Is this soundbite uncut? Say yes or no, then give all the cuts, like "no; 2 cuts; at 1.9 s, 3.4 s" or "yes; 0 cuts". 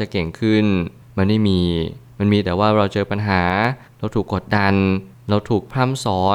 yes; 0 cuts